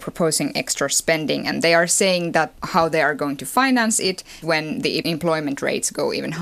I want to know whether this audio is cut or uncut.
cut